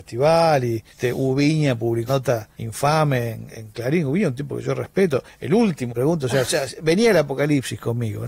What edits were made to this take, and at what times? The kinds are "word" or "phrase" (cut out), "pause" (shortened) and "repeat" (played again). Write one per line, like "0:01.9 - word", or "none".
0:00.9 - pause
0:02.1 - word
0:02.5 - pause
0:03.5 - word
0:05.9 - phrase
0:06.7 - word